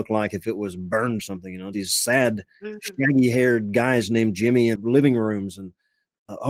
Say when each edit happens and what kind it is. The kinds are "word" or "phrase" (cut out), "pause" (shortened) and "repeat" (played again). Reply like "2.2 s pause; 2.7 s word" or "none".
1.2 s phrase; 1.7 s word; 4.8 s word